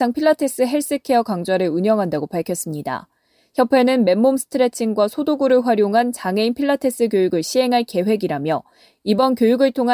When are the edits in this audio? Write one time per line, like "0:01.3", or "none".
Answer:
none

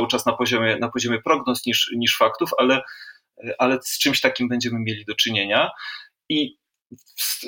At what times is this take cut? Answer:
none

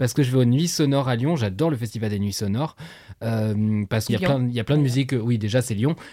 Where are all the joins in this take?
0:04.1

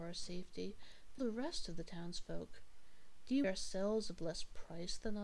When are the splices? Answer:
0:01.2
0:03.4

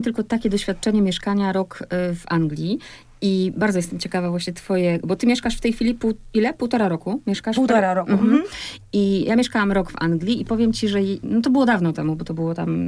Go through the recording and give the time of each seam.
none

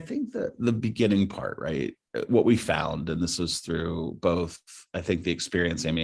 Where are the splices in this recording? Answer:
none

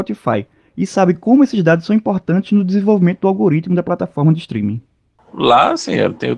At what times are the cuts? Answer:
none

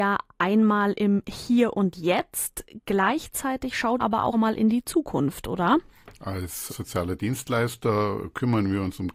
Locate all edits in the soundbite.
0:04.0
0:04.3
0:06.7

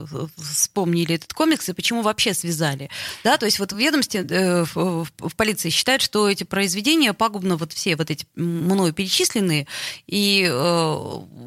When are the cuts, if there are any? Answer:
none

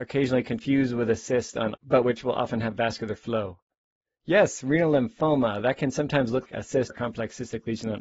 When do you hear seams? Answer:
0:01.7
0:06.4
0:06.9

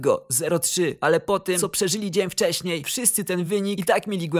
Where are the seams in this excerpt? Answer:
none

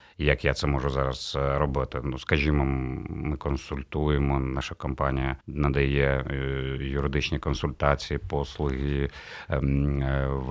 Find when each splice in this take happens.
0:05.4

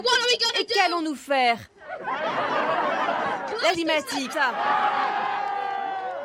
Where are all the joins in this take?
0:03.7
0:04.3

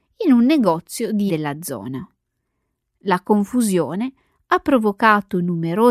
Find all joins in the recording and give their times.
0:01.3

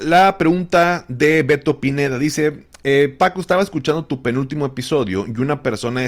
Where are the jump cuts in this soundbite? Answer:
none

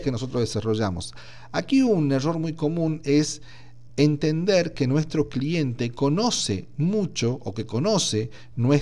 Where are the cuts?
none

